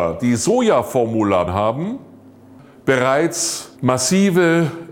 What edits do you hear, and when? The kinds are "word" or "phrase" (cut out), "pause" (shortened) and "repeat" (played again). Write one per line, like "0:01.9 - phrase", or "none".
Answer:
0:01.5 - word
0:03.7 - pause